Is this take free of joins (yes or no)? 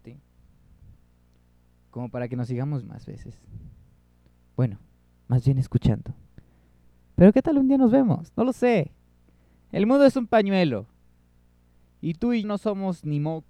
no